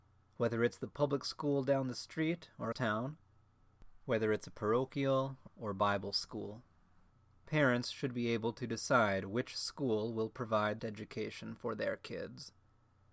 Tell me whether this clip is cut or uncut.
cut